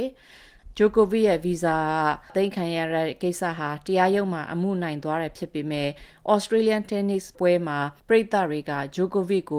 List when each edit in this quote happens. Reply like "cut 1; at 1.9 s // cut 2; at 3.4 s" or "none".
cut 1; at 8.0 s